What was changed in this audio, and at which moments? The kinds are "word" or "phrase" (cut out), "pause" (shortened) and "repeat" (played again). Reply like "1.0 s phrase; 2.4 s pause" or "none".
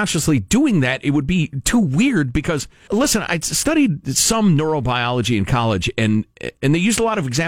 2.9 s word